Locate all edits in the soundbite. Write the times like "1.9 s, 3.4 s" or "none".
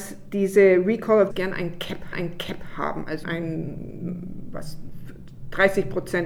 1.3 s, 2.1 s, 3.2 s